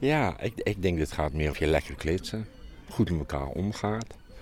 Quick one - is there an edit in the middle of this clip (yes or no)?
yes